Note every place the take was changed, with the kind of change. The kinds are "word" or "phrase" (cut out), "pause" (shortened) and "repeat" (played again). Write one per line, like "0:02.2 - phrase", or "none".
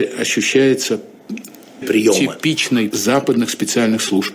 0:01.8 - word
0:02.9 - word